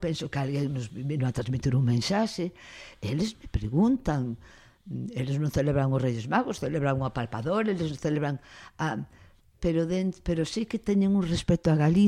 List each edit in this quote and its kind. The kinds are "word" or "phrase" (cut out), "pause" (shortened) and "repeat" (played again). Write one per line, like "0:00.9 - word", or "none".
none